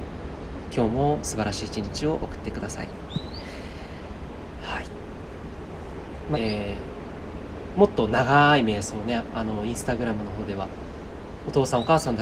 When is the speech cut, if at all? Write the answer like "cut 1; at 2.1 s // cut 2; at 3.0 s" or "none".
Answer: cut 1; at 6.3 s